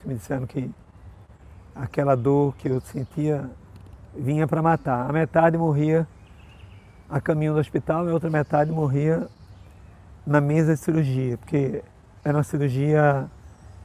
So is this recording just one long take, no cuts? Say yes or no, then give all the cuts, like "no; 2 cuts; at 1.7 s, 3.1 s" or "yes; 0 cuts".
yes; 0 cuts